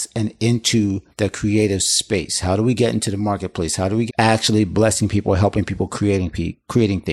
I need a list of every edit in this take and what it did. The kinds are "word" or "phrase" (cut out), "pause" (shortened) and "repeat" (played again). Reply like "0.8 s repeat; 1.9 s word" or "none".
1.1 s pause; 4.1 s phrase